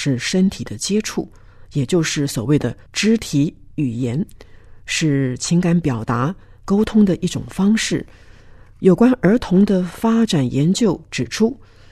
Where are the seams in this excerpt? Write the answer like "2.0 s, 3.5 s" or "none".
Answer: 2.9 s